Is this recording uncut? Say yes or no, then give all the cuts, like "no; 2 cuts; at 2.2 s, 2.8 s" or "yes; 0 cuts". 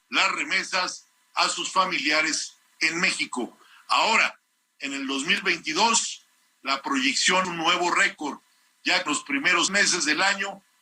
no; 3 cuts; at 7.4 s, 9.1 s, 9.7 s